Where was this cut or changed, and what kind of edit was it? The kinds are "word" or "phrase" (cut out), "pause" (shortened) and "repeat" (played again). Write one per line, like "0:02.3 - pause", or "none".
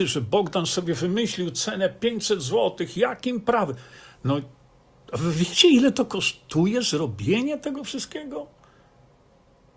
none